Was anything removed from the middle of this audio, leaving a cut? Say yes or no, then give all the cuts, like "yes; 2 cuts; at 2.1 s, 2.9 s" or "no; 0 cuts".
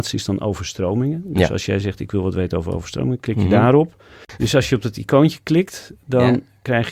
no; 0 cuts